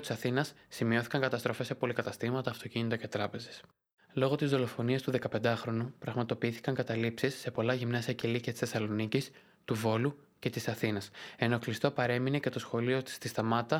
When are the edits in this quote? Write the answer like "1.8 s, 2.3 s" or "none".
none